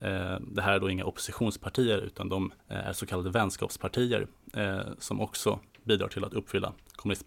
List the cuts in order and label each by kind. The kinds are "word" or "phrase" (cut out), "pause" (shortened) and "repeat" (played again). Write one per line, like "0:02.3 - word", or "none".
0:02.6 - pause